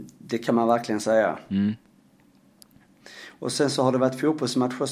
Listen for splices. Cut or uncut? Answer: uncut